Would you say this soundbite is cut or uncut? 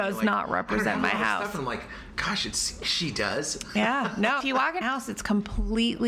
cut